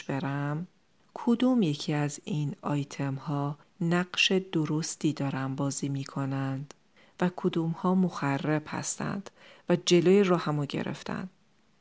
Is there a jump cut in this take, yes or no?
no